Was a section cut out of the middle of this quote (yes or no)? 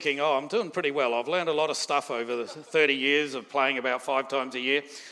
no